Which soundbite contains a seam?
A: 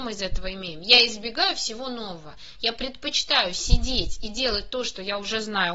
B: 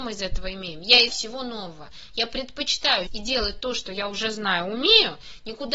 B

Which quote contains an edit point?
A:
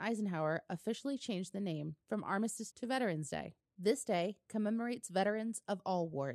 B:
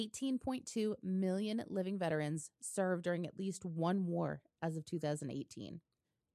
A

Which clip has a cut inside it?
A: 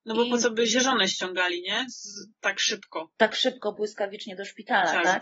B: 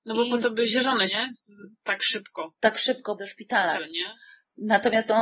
B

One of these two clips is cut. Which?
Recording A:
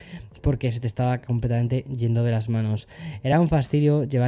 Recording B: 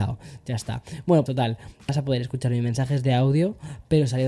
B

